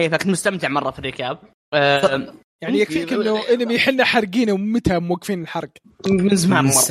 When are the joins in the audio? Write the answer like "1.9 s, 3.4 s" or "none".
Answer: none